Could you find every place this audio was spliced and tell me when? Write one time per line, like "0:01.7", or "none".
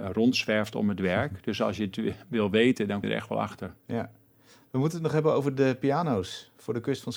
0:03.0